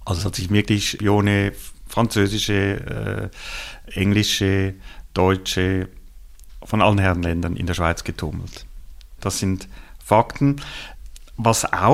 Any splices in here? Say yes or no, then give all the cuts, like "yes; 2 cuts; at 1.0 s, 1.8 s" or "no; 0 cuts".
no; 0 cuts